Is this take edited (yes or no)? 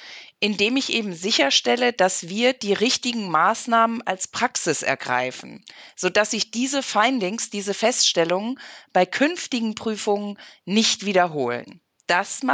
no